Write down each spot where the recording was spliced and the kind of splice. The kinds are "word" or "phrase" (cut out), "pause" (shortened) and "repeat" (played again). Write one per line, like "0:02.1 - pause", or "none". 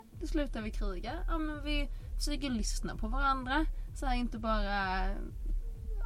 none